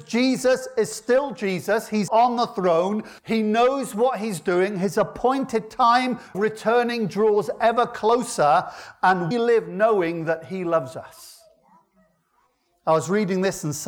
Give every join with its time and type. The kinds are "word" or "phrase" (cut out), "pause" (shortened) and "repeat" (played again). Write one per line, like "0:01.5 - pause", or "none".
0:02.1 - word
0:03.2 - pause
0:06.3 - word
0:09.3 - word